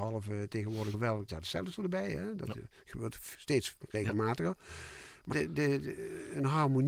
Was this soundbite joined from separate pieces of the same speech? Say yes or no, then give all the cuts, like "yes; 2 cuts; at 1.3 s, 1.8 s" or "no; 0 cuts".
yes; 3 cuts; at 0.9 s, 1.3 s, 5.3 s